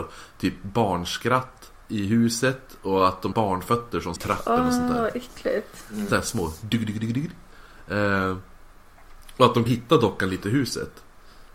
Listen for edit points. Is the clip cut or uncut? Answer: cut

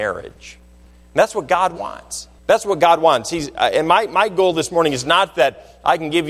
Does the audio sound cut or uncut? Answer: cut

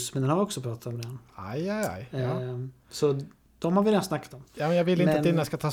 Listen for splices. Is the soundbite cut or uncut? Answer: uncut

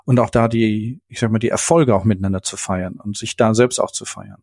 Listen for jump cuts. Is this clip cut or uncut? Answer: uncut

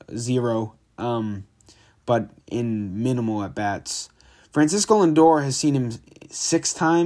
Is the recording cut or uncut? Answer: uncut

